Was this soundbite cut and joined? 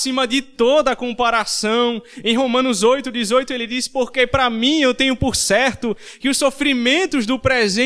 no; 0 cuts

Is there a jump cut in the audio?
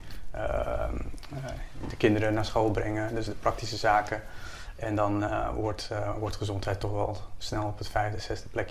no; 0 cuts

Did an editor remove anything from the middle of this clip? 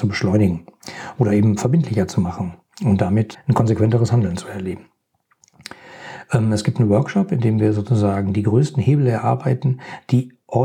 yes; 1 cut; at 3.3 s

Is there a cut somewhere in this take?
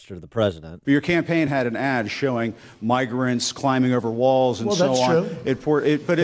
no; 0 cuts

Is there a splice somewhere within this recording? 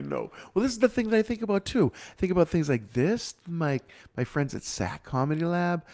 no; 0 cuts

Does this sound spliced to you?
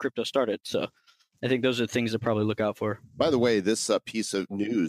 no; 0 cuts

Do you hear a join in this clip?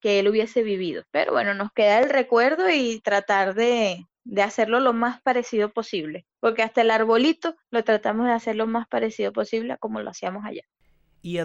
yes; 4 cuts; at 1.1 s, 4.1 s, 6.3 s, 7.6 s

